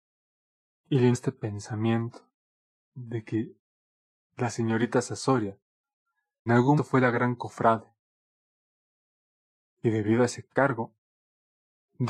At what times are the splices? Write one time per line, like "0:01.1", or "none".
0:01.1
0:06.5
0:06.8